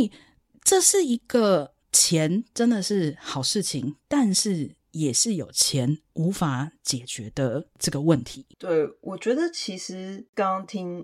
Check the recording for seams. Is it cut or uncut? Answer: cut